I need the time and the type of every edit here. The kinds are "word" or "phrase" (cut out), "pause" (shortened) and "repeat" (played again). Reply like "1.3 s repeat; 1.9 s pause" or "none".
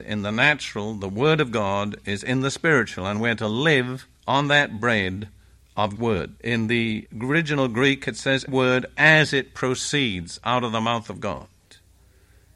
4.2 s pause; 6.0 s word; 6.4 s pause; 8.5 s word